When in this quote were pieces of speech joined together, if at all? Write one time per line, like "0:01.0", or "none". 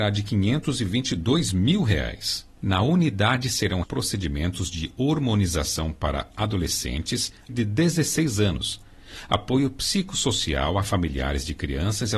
0:03.8
0:07.5